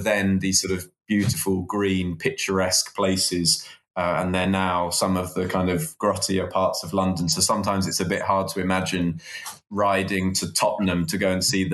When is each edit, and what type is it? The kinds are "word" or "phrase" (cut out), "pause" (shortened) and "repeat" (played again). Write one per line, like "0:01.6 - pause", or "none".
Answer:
none